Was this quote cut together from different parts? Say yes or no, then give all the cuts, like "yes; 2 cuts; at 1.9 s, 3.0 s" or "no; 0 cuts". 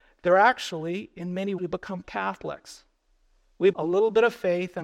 yes; 3 cuts; at 1.6 s, 2.0 s, 3.7 s